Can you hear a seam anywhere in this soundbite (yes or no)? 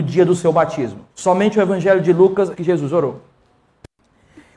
yes